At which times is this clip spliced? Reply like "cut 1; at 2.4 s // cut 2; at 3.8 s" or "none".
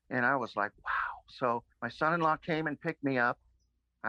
cut 1; at 1.7 s